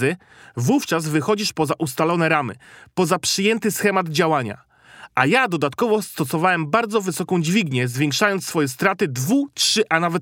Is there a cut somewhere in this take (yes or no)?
no